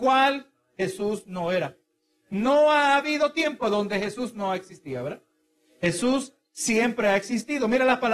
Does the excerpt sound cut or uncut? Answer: uncut